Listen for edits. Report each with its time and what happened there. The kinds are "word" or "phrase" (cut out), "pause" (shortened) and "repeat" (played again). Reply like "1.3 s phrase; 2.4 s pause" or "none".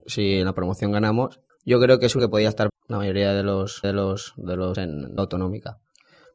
1.5 s pause; 2.2 s word; 2.7 s word; 3.8 s repeat; 4.7 s word; 5.2 s word